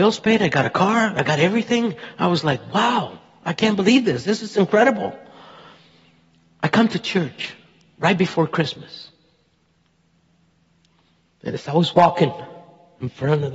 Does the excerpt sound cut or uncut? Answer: uncut